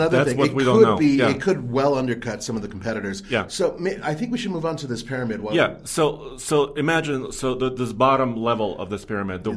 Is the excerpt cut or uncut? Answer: uncut